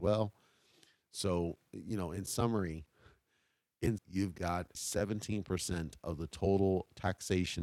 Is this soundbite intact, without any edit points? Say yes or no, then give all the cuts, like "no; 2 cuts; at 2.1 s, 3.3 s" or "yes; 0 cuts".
no; 2 cuts; at 4.0 s, 4.7 s